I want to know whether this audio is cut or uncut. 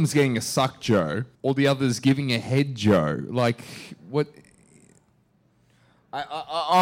cut